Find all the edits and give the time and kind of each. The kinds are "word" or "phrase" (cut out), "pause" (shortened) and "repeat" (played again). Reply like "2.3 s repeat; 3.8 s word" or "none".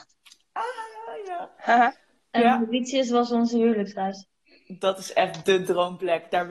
none